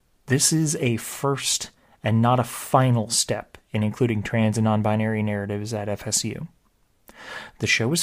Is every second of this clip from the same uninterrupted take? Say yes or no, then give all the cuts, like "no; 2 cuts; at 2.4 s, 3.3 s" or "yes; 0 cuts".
yes; 0 cuts